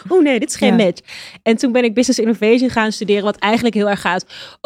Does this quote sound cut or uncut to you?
uncut